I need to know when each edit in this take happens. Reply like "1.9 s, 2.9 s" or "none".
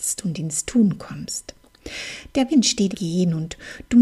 2.5 s, 2.9 s